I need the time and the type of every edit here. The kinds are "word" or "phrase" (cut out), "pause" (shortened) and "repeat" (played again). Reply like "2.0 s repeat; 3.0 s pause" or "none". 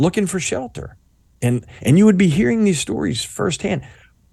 1.8 s pause